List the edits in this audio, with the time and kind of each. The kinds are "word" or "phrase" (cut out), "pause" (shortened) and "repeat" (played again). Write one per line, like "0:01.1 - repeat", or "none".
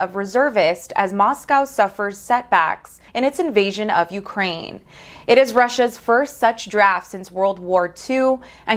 0:03.1 - pause